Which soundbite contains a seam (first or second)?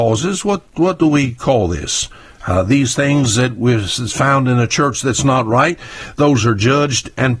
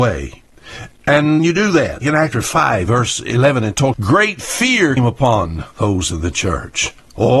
second